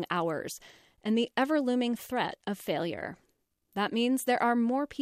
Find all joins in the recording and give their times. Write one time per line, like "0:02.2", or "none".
none